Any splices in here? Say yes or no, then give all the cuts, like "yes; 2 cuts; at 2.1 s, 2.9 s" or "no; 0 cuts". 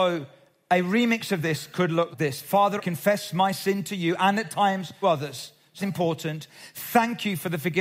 yes; 4 cuts; at 2.1 s, 2.8 s, 5.0 s, 5.8 s